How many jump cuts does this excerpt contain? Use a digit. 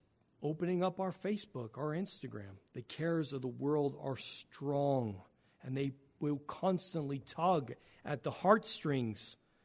1